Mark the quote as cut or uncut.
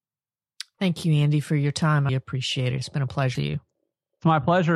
cut